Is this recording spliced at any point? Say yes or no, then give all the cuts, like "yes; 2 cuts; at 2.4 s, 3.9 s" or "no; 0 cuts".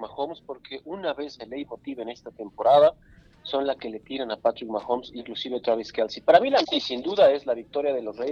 yes; 4 cuts; at 1.4 s, 3.8 s, 5.2 s, 6.6 s